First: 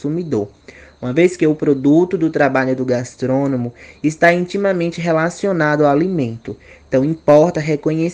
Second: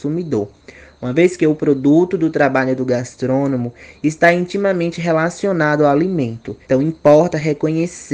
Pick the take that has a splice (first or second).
second